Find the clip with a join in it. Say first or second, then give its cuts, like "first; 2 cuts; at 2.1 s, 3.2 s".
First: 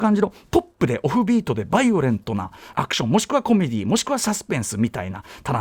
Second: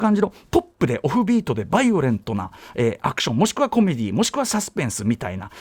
first; 1 cut; at 2.7 s